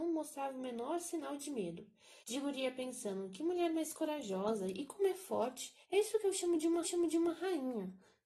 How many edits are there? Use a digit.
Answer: 3